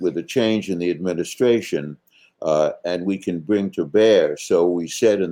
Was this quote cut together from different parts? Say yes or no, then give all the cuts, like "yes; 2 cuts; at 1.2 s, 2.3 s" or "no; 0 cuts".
no; 0 cuts